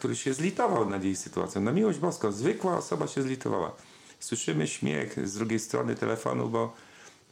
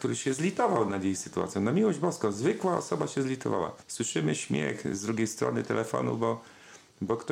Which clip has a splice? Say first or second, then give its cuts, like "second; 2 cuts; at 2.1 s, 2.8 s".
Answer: second; 1 cut; at 3.8 s